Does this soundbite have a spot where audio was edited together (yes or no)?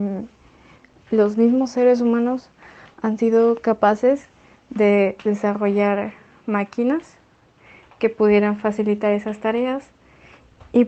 no